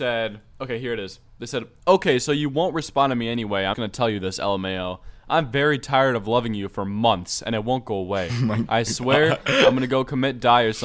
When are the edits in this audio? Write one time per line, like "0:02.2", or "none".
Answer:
0:03.7